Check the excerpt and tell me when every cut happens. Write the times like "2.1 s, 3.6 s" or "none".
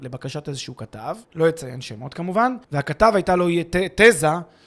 1.2 s, 2.6 s